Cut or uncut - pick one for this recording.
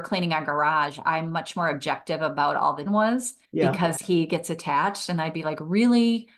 cut